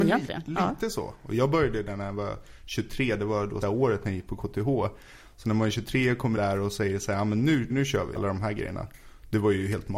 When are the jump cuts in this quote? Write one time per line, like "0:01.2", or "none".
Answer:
0:03.6
0:06.4
0:07.7
0:08.2